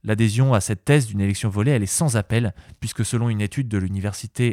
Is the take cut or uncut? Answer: uncut